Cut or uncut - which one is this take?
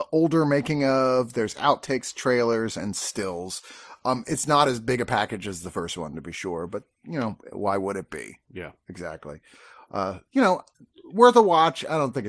uncut